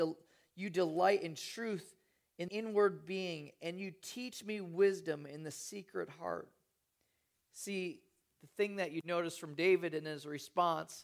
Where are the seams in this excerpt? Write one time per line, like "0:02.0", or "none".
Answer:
0:02.5